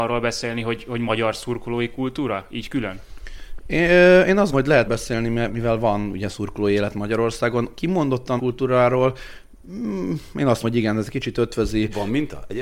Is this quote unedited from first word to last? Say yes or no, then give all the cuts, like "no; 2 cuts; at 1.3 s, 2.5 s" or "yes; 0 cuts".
no; 5 cuts; at 4.5 s, 4.9 s, 5.5 s, 8.4 s, 10.6 s